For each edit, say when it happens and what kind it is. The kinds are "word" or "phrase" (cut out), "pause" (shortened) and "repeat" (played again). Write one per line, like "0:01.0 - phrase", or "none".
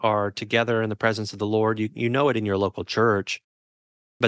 none